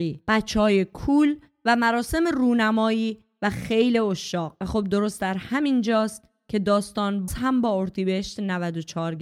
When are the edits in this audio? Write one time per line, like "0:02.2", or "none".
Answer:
0:07.3